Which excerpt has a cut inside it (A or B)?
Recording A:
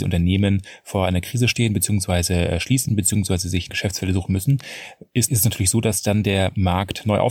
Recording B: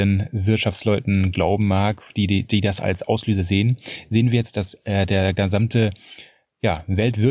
A